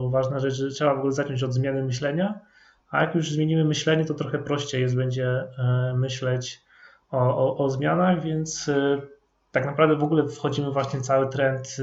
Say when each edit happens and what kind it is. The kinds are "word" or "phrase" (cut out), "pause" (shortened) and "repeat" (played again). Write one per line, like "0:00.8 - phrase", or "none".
none